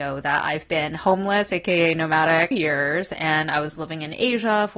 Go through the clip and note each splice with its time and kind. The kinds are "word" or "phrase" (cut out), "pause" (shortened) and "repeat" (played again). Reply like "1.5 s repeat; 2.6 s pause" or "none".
2.5 s phrase